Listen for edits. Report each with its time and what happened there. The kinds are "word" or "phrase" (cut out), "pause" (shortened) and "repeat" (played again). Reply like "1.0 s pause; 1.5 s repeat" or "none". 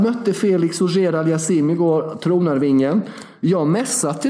none